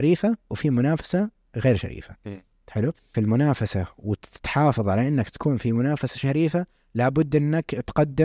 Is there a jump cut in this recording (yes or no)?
yes